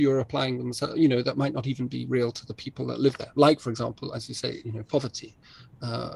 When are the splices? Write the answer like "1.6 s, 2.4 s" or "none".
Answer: none